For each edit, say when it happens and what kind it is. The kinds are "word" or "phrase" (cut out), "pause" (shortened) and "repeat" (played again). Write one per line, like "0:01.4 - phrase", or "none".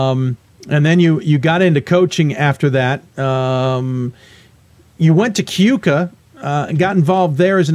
none